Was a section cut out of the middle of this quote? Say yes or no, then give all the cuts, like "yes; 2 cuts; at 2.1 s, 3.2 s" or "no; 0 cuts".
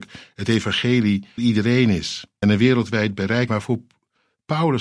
yes; 3 cuts; at 1.4 s, 2.4 s, 3.5 s